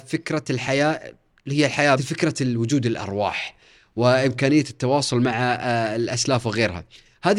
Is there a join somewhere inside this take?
yes; 1 cut; at 2.0 s

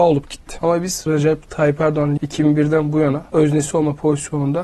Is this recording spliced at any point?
yes; 3 cuts; at 1.1 s, 2.2 s, 3.3 s

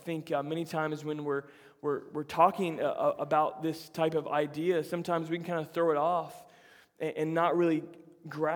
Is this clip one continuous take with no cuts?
yes; 0 cuts

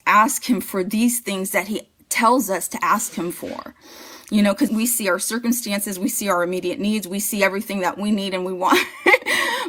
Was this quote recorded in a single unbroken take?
no; 1 cut; at 4.7 s

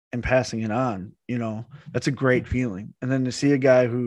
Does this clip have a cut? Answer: yes; 1 cut; at 1.8 s

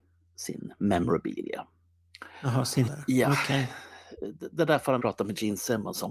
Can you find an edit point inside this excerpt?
yes; 2 cuts; at 2.9 s, 5.0 s

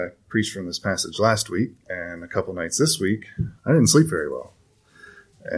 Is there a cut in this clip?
yes; 2 cuts; at 1.8 s, 3.6 s

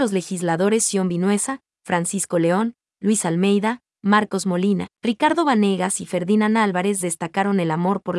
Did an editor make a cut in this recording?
no; 0 cuts

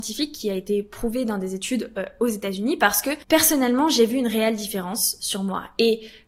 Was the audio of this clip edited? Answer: yes; 1 cut; at 3.2 s

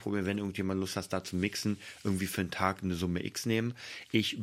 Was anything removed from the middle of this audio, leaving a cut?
no; 0 cuts

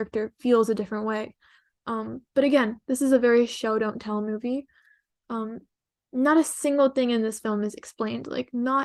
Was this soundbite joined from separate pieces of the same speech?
no; 0 cuts

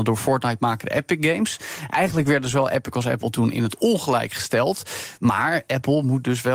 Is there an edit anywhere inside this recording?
no; 0 cuts

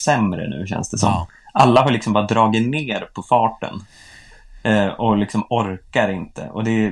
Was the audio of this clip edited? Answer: no; 0 cuts

